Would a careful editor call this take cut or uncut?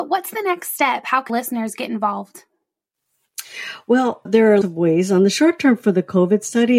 cut